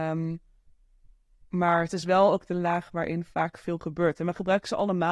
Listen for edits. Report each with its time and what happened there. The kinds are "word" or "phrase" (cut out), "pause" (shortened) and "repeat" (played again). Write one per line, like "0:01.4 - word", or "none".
none